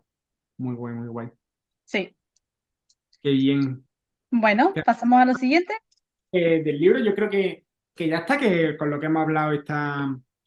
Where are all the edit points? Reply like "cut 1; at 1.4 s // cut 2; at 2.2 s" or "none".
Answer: none